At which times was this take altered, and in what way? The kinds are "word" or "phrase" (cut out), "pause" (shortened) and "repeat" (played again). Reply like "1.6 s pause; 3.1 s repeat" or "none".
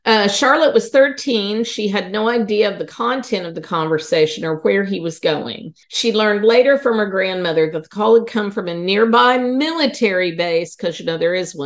5.8 s pause